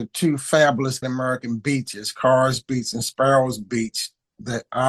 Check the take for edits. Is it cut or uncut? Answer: cut